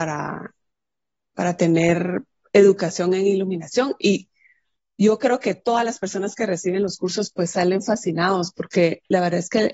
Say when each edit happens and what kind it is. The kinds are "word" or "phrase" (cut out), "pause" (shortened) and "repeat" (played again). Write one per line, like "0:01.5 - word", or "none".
none